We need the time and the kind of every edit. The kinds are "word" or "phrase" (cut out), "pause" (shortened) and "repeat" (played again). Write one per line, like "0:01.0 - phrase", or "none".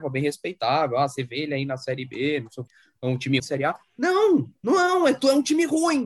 0:02.7 - word
0:03.4 - word